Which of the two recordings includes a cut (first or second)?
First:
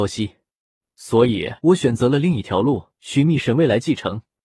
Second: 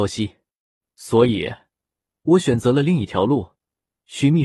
first